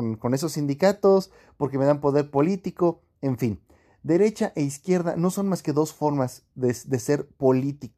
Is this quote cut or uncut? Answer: uncut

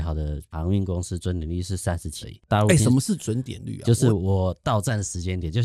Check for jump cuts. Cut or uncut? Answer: cut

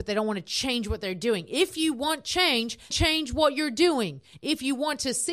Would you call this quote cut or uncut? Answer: cut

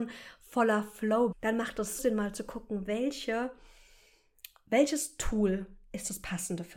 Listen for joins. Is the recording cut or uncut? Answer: cut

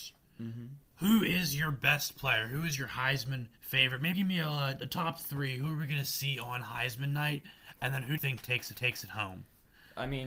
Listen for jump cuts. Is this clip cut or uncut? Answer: cut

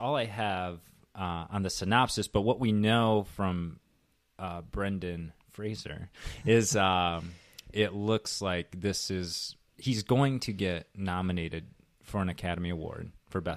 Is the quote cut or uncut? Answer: uncut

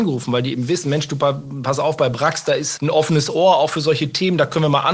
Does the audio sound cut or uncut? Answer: uncut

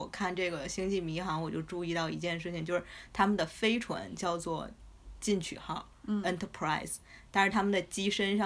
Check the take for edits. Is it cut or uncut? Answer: uncut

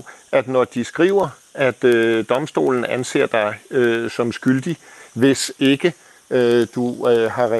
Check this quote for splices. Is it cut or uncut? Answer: uncut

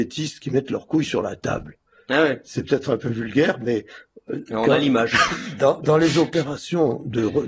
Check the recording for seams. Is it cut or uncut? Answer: uncut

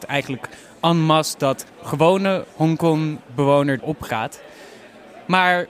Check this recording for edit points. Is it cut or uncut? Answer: cut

